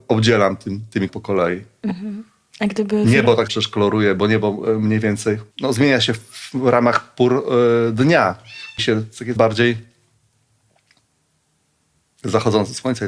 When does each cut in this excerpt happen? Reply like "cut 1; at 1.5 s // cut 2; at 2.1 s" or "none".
cut 1; at 1.1 s // cut 2; at 3.5 s // cut 3; at 5.5 s // cut 4; at 8.8 s // cut 5; at 9.4 s